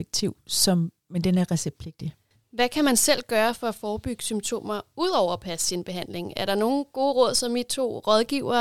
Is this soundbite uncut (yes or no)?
yes